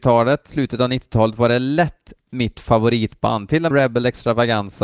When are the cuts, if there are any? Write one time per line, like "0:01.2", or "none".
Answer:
0:03.7